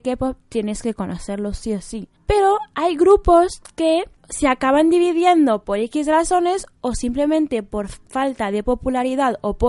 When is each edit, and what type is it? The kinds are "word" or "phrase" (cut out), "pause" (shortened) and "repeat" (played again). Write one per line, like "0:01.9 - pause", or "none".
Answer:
0:02.2 - pause
0:04.2 - pause